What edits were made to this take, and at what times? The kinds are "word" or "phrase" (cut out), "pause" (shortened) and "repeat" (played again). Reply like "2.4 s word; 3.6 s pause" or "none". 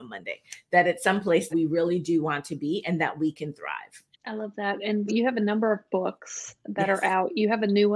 1.5 s word; 4.1 s pause; 5.1 s word